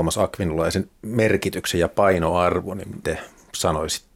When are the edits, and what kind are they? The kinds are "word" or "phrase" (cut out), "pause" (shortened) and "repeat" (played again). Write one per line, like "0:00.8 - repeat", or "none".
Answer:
0:03.0 - word